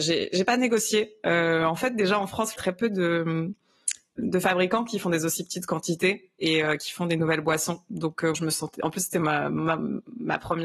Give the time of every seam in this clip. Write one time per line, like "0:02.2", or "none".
0:02.5
0:04.2
0:08.3

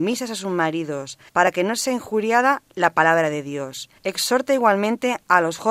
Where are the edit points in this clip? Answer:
0:01.3
0:04.0

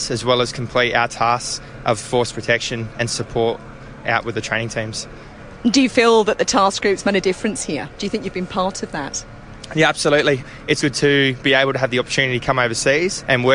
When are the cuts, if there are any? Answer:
0:10.8

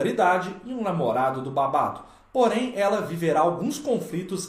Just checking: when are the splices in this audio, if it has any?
none

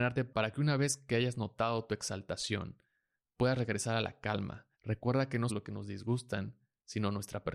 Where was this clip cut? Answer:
0:04.7
0:05.5

